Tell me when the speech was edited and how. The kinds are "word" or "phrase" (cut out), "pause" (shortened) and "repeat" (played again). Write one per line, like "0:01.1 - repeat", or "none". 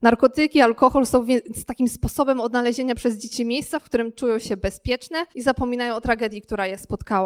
0:05.3 - pause